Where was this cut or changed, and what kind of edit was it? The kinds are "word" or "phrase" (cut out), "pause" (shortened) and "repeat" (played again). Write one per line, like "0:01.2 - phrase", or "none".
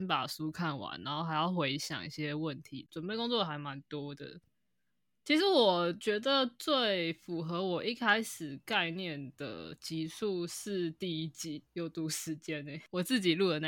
none